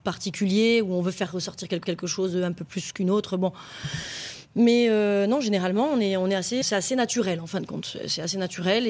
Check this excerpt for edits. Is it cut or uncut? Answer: cut